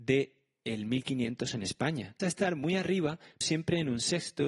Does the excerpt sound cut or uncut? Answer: cut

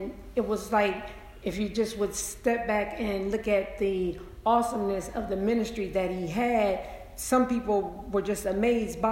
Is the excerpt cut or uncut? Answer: uncut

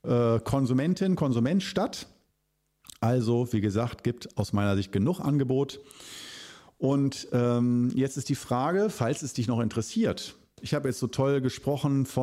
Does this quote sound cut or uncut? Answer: uncut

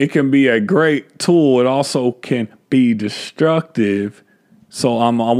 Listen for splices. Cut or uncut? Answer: uncut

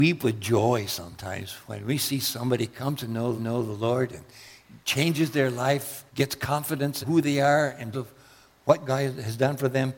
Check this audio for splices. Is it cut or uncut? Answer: cut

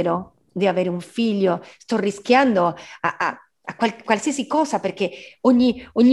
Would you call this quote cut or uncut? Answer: uncut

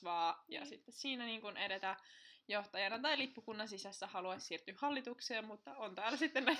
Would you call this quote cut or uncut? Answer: uncut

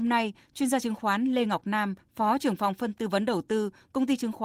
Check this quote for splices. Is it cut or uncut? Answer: cut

